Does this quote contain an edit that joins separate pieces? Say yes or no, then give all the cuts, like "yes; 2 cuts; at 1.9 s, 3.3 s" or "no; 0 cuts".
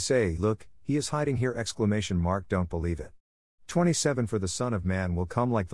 no; 0 cuts